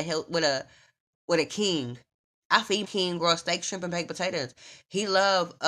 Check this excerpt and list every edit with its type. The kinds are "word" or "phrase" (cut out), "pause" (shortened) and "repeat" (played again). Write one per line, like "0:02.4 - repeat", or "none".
0:02.8 - word